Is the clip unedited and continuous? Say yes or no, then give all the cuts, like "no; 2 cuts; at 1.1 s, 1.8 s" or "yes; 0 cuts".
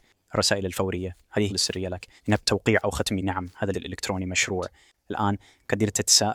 no; 4 cuts; at 1.5 s, 2.2 s, 3.2 s, 3.7 s